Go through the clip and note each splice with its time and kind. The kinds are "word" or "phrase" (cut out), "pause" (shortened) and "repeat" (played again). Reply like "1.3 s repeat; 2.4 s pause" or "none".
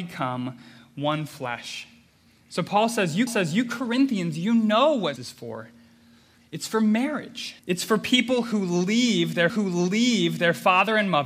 3.3 s repeat; 5.2 s word; 7.6 s pause; 9.5 s repeat